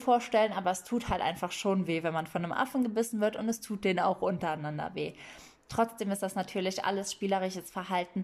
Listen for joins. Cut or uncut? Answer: uncut